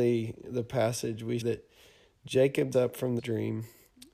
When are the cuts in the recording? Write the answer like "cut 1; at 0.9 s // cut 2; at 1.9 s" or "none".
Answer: cut 1; at 1.4 s // cut 2; at 2.7 s // cut 3; at 3.2 s